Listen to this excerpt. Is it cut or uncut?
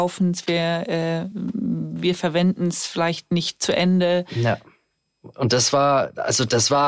uncut